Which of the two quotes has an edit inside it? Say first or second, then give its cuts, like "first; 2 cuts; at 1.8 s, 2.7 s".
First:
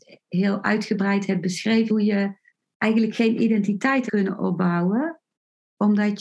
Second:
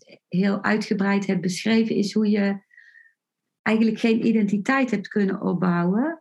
first; 3 cuts; at 1.9 s, 2.5 s, 4.1 s